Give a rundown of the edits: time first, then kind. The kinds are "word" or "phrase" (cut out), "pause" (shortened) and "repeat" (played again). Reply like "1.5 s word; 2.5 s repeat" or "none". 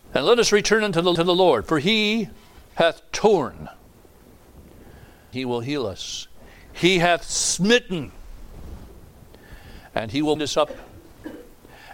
1.2 s repeat; 2.7 s pause; 5.3 s word; 10.4 s word

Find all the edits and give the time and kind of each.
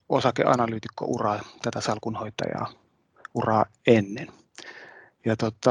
none

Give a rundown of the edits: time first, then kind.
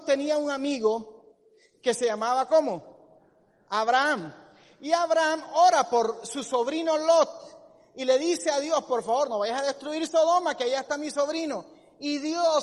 none

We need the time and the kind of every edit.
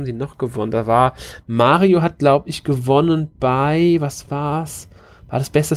none

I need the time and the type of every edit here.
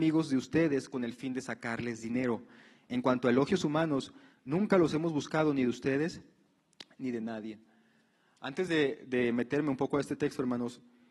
none

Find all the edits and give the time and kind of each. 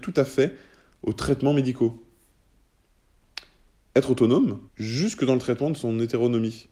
4.7 s pause

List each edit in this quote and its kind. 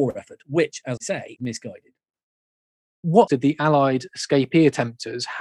1.0 s word; 1.4 s word; 3.3 s word

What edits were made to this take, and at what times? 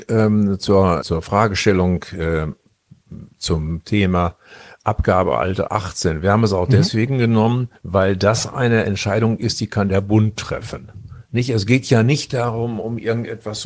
1.0 s word; 3.3 s pause; 5.7 s word; 7.8 s pause

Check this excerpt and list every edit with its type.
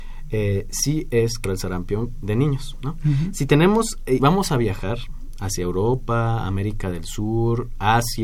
1.4 s phrase; 4.2 s word

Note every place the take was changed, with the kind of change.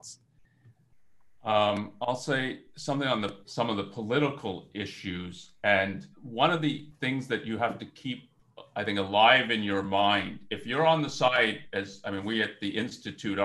3.4 s pause; 6.1 s pause

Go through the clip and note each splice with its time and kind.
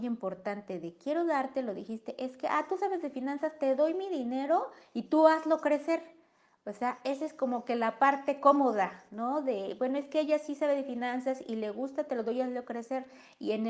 none

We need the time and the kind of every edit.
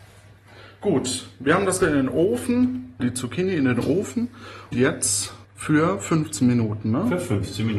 1.8 s word; 3.0 s word; 4.7 s word; 5.4 s pause

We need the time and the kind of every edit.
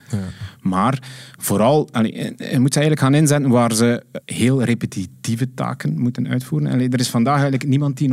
4.2 s pause

